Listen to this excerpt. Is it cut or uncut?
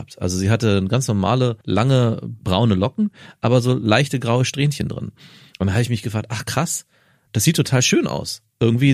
cut